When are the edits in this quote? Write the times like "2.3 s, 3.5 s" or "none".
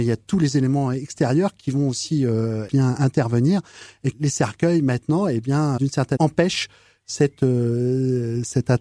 2.7 s, 4.1 s, 5.8 s, 6.2 s